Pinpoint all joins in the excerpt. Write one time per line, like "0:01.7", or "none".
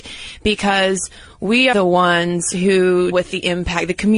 0:01.7
0:03.1